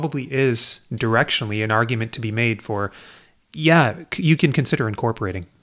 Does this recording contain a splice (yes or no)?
no